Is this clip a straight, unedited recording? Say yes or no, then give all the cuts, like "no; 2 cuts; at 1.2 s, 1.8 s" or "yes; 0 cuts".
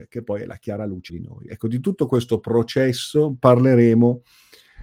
no; 1 cut; at 1.1 s